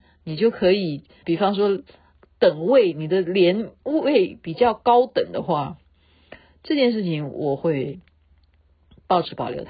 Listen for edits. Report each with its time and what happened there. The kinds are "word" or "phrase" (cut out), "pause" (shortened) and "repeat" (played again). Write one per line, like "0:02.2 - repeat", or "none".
0:01.2 - word